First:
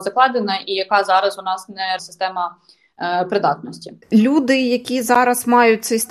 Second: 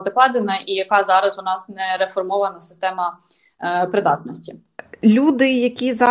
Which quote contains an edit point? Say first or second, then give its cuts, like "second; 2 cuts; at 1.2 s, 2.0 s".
first; 2 cuts; at 2.0 s, 4.0 s